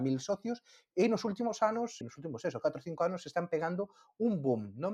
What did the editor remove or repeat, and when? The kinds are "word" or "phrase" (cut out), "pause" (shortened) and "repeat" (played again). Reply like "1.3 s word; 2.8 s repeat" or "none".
2.0 s word